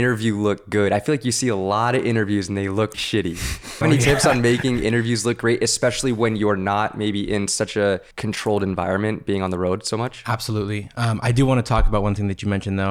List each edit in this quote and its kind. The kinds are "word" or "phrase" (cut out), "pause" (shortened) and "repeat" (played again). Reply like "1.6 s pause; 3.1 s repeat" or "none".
2.9 s word; 3.8 s phrase; 8.1 s pause